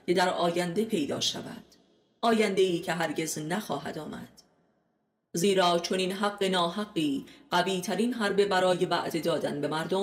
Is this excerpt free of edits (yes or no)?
yes